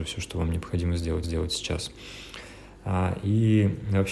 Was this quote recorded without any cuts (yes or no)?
no